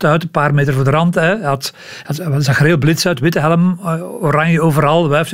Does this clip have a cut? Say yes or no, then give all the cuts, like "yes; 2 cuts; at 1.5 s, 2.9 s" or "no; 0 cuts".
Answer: no; 0 cuts